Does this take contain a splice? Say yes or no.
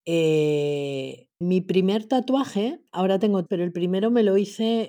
yes